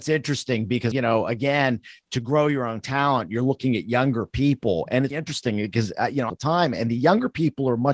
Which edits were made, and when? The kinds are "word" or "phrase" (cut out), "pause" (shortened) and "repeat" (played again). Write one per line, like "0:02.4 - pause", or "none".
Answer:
0:00.9 - phrase
0:05.1 - word
0:06.3 - phrase